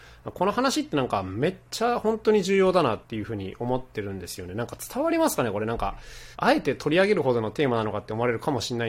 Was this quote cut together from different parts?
yes; 2 cuts; at 3.0 s, 6.3 s

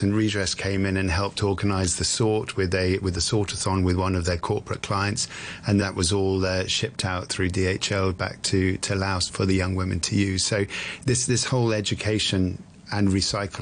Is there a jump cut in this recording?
yes; 2 cuts; at 5.8 s, 9.3 s

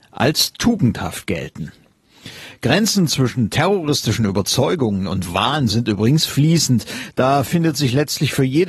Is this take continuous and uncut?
yes; 0 cuts

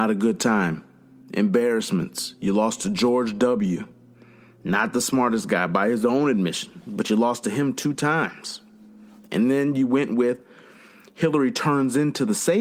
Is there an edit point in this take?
no; 0 cuts

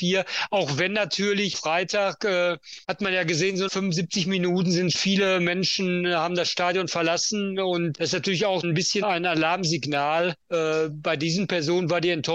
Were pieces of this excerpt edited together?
yes; 8 cuts; at 1.5 s, 2.8 s, 3.7 s, 4.9 s, 7.9 s, 8.6 s, 9.0 s, 10.4 s

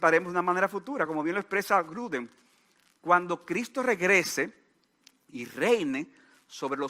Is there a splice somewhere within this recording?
no; 0 cuts

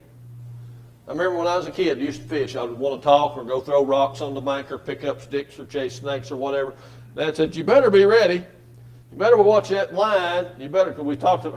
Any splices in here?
yes; 1 cut; at 9.0 s

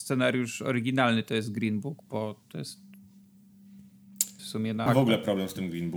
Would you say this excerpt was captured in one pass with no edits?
no; 2 cuts; at 4.4 s, 4.9 s

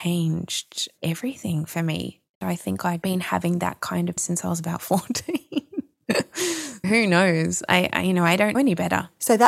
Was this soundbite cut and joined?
yes; 3 cuts; at 4.2 s, 6.8 s, 8.5 s

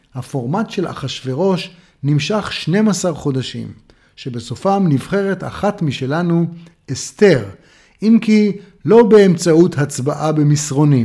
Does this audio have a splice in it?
no; 0 cuts

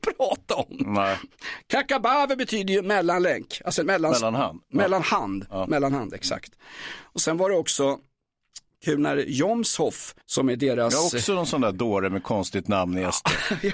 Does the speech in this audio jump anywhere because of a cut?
yes; 2 cuts; at 3.8 s, 10.2 s

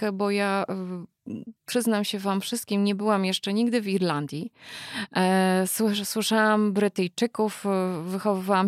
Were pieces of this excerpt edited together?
yes; 1 cut; at 1.6 s

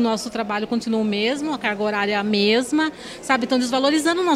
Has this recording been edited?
no; 0 cuts

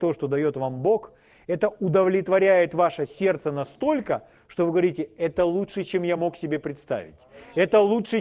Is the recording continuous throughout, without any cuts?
yes; 0 cuts

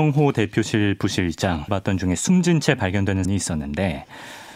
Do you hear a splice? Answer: yes; 2 cuts; at 1.7 s, 3.2 s

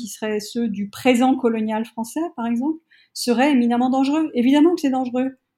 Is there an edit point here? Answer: no; 0 cuts

